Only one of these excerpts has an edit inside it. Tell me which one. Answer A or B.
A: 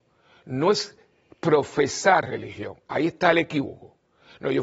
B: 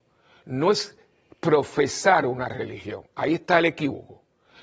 A